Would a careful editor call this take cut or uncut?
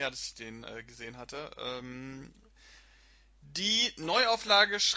uncut